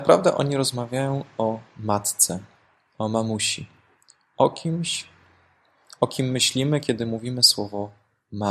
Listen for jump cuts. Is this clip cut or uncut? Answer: uncut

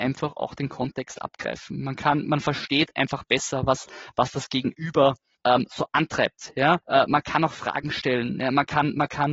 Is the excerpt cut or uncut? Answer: cut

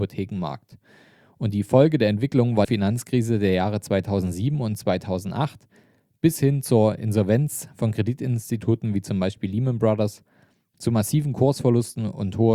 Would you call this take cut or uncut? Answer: cut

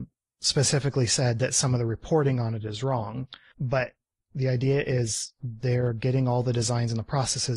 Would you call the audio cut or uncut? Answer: uncut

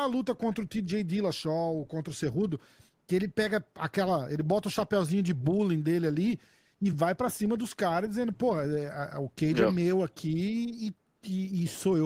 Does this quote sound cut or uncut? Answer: uncut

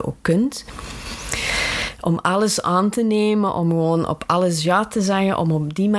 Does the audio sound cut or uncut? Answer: uncut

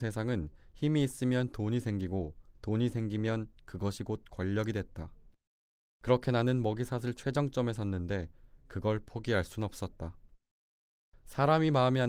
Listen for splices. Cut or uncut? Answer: uncut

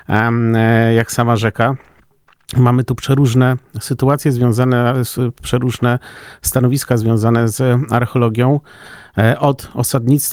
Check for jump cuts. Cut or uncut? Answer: uncut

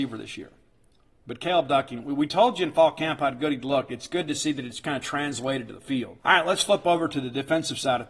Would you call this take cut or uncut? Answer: cut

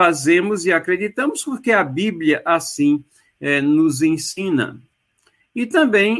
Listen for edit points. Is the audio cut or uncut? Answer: uncut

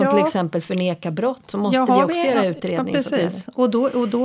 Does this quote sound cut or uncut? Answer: uncut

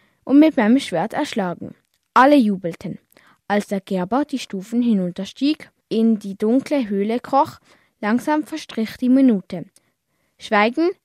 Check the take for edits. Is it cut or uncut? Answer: uncut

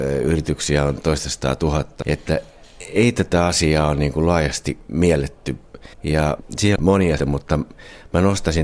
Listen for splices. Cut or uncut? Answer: cut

